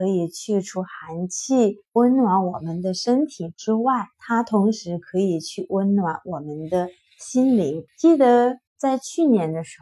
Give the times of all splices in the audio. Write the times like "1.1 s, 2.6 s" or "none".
1.8 s, 4.1 s, 7.9 s, 8.7 s